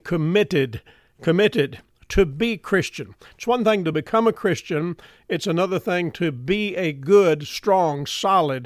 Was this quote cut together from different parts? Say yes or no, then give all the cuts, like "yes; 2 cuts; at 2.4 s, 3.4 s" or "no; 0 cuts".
no; 0 cuts